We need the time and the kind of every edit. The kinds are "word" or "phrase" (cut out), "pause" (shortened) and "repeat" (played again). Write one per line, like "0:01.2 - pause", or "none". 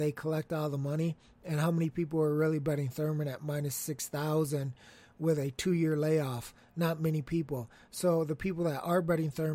none